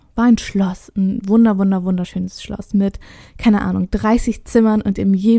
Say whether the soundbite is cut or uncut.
uncut